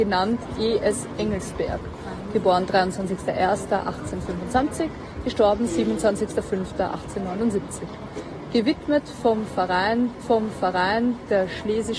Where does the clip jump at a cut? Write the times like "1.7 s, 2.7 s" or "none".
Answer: 10.2 s